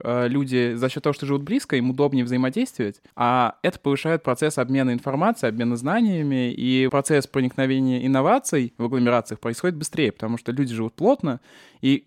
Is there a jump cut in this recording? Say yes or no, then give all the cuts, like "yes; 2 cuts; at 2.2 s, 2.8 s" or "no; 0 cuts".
yes; 2 cuts; at 3.1 s, 6.9 s